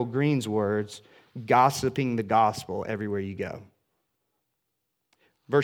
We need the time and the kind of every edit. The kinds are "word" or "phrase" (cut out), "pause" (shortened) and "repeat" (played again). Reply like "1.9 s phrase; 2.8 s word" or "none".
none